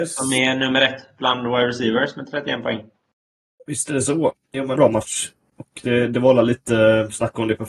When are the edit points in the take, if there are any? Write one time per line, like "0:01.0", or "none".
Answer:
0:04.8